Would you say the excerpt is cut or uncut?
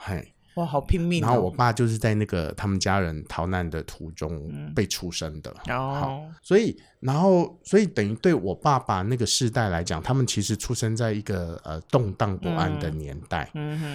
cut